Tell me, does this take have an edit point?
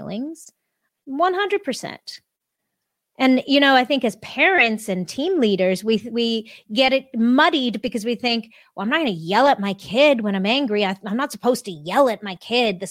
no; 0 cuts

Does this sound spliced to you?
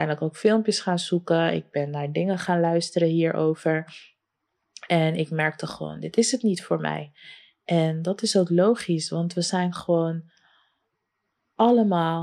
no; 0 cuts

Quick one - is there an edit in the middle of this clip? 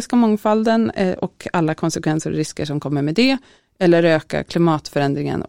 no; 0 cuts

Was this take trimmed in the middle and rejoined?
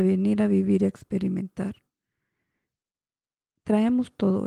no; 0 cuts

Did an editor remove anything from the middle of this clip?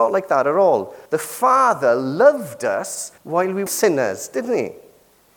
yes; 3 cuts; at 1.1 s, 3.2 s, 3.7 s

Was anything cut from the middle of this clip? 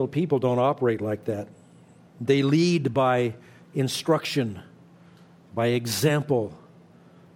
no; 0 cuts

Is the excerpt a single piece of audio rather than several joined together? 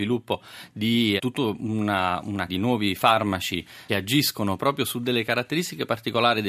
no; 3 cuts; at 1.2 s, 2.5 s, 3.9 s

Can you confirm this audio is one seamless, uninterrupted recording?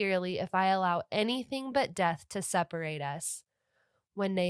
yes; 0 cuts

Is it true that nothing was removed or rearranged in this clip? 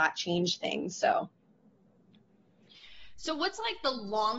yes; 0 cuts

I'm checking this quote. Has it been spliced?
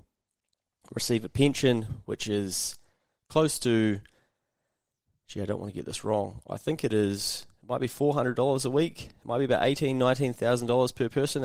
no; 0 cuts

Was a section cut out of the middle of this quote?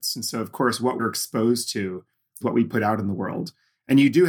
yes; 2 cuts; at 1.0 s, 2.4 s

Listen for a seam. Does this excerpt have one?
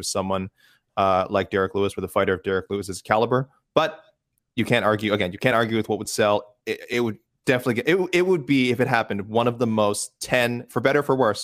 no; 0 cuts

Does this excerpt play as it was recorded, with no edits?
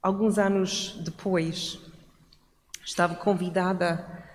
yes; 0 cuts

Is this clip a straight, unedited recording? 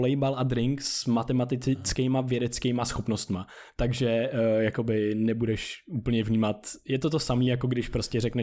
yes; 0 cuts

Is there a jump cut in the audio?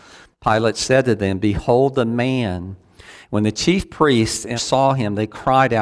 yes; 1 cut; at 4.6 s

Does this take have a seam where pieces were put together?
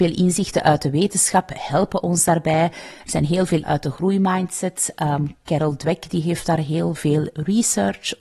yes; 1 cut; at 3.6 s

